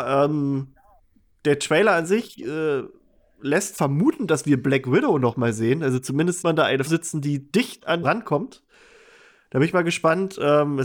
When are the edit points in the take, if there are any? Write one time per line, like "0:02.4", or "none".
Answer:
0:03.7
0:06.4
0:06.9
0:07.5
0:08.0

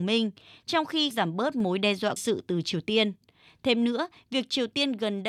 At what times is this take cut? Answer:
0:01.1
0:02.2

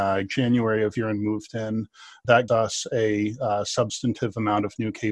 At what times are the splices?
0:01.0
0:02.5

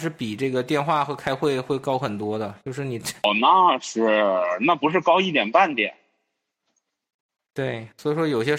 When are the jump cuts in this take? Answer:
none

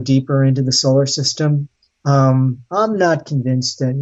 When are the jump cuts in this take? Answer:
0:01.9

